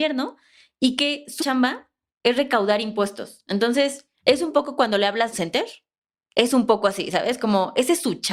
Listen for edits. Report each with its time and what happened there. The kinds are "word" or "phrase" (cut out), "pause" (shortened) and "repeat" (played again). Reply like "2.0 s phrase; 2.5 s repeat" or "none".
1.4 s word; 4.1 s pause; 5.3 s phrase